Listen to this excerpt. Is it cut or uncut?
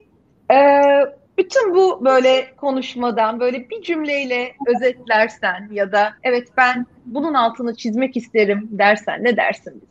cut